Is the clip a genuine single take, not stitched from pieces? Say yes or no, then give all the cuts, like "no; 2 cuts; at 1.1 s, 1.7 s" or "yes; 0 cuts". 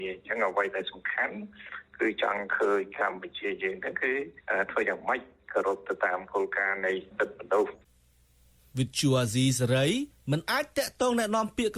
yes; 0 cuts